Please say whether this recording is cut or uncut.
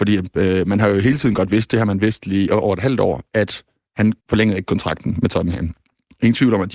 cut